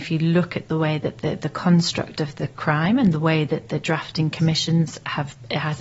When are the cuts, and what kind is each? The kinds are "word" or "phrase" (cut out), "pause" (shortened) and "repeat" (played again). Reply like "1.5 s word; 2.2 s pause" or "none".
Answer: none